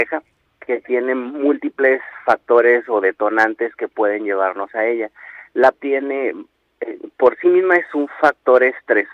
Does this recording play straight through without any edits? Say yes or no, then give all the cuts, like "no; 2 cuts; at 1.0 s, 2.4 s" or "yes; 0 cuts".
no; 1 cut; at 5.7 s